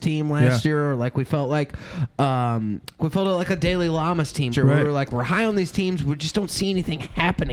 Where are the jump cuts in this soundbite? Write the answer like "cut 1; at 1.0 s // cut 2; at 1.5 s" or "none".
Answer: cut 1; at 3.0 s // cut 2; at 4.5 s